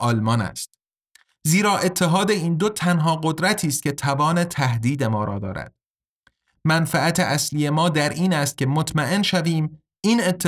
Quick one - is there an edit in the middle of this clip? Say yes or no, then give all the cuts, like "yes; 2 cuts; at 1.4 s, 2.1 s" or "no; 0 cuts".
no; 0 cuts